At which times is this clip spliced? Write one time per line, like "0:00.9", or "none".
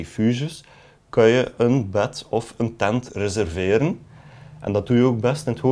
none